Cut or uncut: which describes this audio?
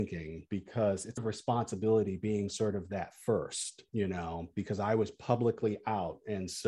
cut